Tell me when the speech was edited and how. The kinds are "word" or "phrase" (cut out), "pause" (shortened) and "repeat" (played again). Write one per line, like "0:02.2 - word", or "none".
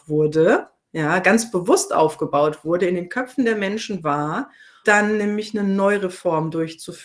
0:04.8 - word